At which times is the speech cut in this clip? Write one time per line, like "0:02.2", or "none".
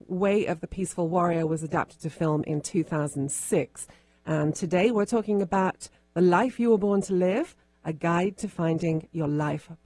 none